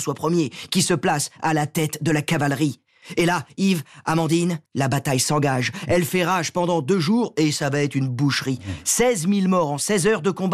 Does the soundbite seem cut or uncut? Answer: cut